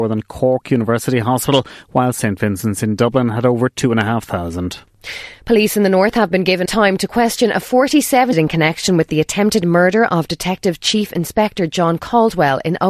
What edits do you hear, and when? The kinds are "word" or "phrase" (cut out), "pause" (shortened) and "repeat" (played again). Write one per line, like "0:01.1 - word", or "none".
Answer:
0:06.7 - word
0:08.3 - phrase